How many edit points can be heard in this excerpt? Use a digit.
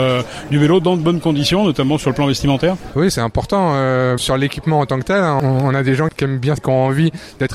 2